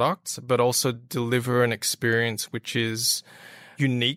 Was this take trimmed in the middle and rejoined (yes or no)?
no